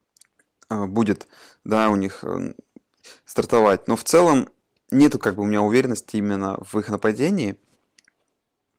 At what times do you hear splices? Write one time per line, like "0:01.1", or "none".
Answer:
none